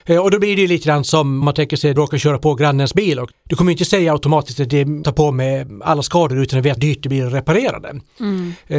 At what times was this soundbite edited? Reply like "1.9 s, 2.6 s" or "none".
1.4 s, 2.0 s, 3.3 s, 5.0 s, 6.8 s

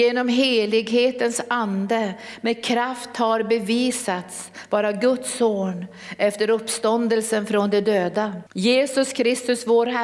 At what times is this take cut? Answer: 8.5 s

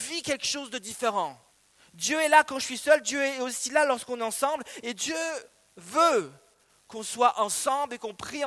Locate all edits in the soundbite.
1.5 s

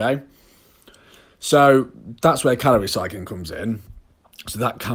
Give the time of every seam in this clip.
none

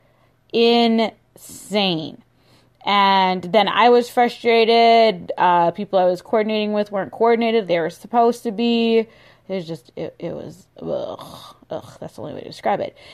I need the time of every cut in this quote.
7.7 s

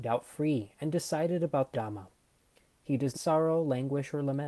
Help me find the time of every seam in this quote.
1.7 s, 3.1 s

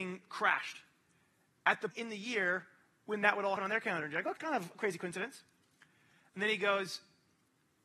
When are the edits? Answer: 1.9 s, 3.6 s, 4.4 s

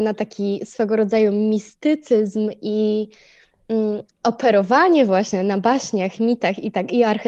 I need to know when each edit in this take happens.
none

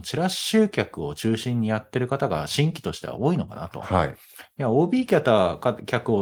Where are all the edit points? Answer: none

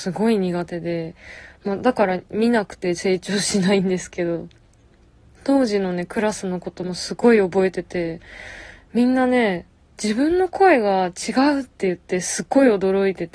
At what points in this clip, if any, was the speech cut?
none

